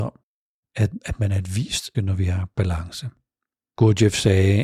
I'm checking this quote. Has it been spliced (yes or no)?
yes